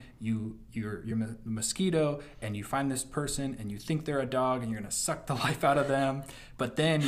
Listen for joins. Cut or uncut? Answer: uncut